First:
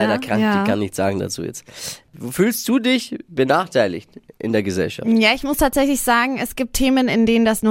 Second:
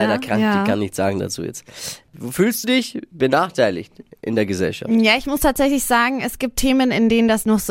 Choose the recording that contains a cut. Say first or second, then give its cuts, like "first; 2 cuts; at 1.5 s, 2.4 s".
second; 1 cut; at 2.6 s